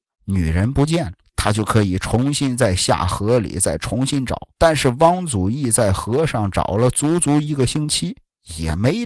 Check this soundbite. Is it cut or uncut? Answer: cut